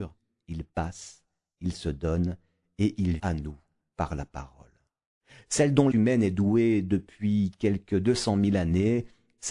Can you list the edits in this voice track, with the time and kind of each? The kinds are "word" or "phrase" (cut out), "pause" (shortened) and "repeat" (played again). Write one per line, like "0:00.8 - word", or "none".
0:03.2 - word
0:05.9 - word